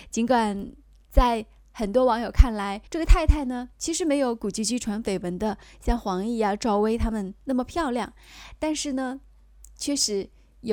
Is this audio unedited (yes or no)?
no